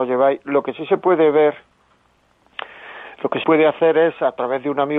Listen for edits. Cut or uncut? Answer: cut